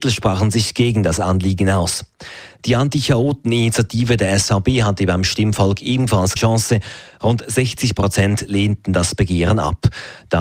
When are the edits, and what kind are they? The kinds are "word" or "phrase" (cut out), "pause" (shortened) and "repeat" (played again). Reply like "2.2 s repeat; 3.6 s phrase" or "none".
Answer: 6.4 s word